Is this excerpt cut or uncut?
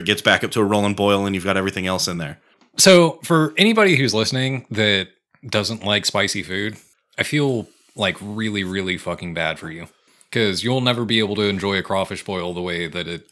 uncut